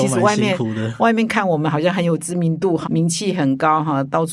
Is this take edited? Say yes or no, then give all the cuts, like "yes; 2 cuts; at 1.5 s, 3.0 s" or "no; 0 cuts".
yes; 1 cut; at 2.8 s